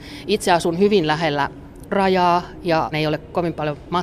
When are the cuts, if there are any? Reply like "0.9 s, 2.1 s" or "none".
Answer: 1.9 s, 2.9 s